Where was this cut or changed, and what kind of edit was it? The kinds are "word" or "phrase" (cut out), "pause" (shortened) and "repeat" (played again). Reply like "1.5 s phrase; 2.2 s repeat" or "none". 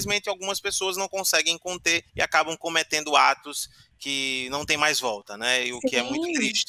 2.1 s pause